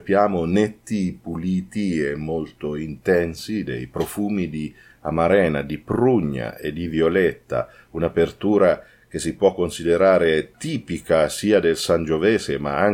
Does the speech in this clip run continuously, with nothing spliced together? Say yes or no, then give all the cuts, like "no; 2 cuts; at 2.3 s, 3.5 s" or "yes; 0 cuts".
yes; 0 cuts